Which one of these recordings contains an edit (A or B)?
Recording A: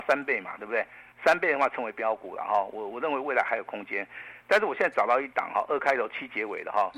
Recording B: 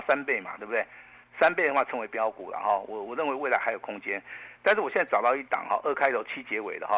A